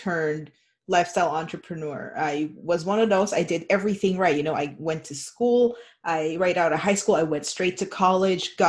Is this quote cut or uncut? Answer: uncut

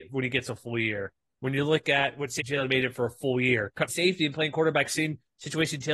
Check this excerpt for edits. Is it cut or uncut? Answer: cut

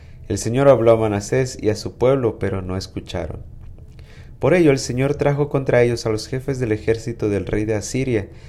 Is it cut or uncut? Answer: uncut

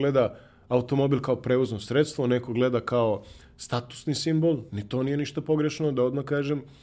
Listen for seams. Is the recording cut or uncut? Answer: uncut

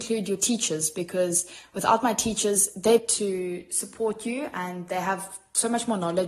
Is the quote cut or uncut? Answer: cut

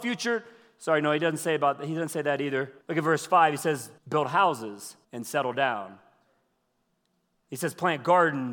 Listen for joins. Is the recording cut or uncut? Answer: cut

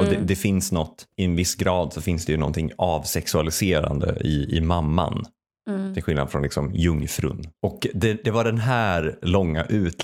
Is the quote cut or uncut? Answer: cut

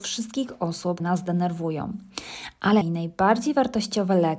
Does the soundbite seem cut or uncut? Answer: cut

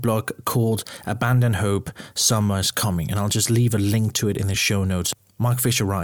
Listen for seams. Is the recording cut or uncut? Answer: uncut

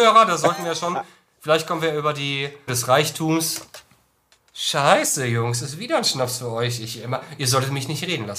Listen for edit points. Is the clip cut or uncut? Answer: cut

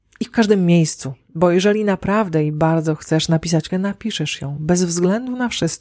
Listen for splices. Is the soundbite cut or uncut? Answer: cut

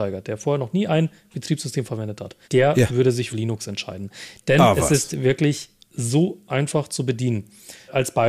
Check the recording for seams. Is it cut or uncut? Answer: cut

